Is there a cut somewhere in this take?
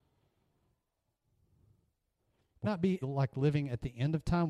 yes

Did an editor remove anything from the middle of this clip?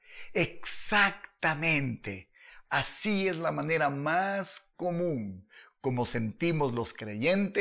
no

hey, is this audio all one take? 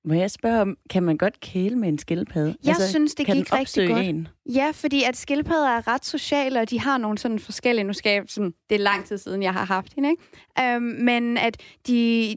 yes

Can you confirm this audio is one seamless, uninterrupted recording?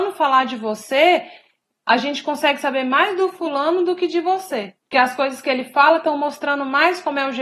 no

